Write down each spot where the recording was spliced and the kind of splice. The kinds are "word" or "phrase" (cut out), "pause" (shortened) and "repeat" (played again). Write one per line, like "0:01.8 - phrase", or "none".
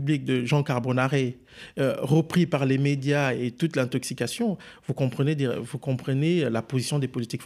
none